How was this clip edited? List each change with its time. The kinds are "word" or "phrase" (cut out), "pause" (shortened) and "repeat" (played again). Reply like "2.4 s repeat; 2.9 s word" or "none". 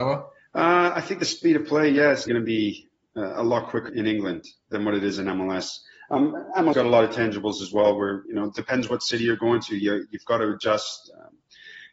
2.3 s word; 3.9 s word; 6.7 s word; 8.2 s word